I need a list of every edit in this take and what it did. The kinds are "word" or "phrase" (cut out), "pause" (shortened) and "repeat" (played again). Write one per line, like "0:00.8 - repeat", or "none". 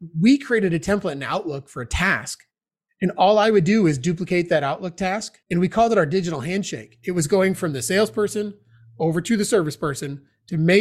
0:05.4 - pause